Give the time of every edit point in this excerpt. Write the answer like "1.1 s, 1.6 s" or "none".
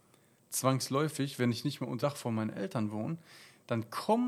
2.0 s